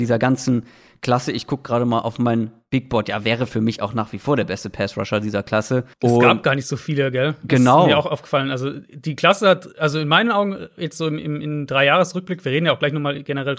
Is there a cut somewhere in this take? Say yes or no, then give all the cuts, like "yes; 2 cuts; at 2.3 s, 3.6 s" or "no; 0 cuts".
yes; 1 cut; at 5.9 s